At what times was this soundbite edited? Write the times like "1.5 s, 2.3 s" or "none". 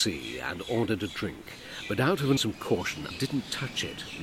2.4 s, 3.1 s